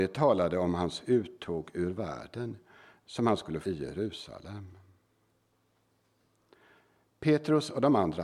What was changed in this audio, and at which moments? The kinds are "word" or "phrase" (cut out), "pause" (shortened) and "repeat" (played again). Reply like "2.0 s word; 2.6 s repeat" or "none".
3.6 s word